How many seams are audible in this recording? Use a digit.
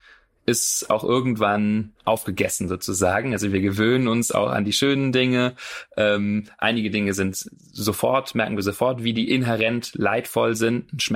1